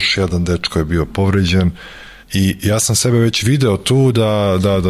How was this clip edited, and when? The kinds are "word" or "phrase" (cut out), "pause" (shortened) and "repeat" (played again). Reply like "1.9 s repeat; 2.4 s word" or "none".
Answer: 2.2 s pause